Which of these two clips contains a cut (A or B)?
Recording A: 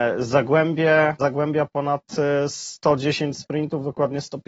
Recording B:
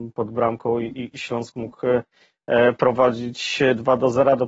A